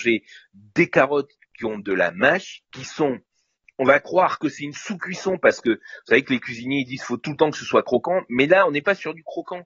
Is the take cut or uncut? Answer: uncut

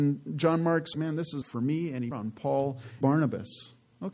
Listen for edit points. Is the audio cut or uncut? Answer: cut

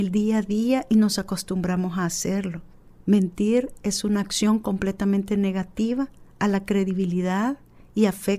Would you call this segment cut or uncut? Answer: cut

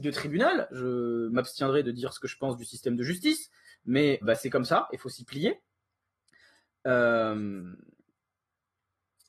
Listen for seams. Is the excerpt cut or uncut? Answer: cut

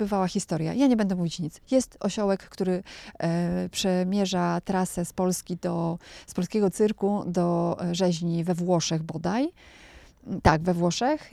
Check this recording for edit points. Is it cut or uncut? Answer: uncut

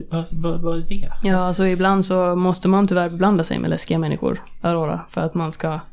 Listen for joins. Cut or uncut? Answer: uncut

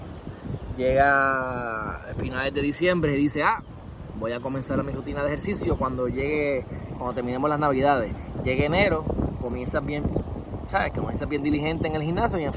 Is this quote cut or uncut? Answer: uncut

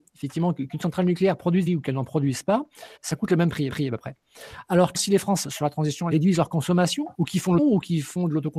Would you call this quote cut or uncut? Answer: cut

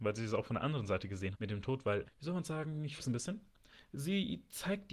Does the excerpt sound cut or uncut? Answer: cut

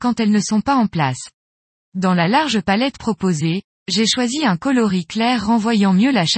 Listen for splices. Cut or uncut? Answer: uncut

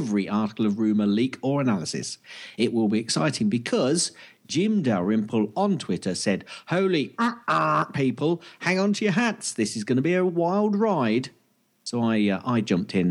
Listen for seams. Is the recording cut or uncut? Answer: uncut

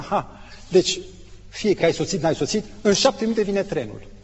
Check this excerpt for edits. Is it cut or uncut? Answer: cut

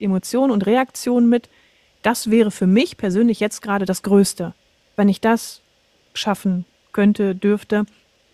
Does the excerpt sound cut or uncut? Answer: uncut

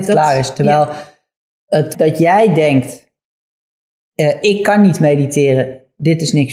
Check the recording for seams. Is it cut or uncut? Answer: cut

